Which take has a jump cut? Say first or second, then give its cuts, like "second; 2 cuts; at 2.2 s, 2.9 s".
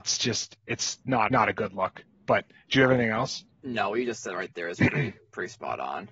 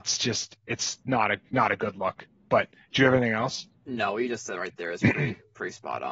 first; 1 cut; at 1.3 s